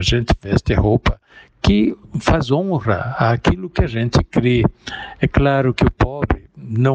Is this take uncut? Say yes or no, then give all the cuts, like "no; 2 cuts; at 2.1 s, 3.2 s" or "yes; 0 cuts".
yes; 0 cuts